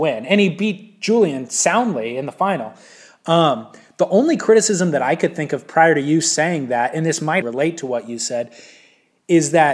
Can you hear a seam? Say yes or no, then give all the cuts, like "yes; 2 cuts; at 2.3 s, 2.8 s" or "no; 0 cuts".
yes; 1 cut; at 7.4 s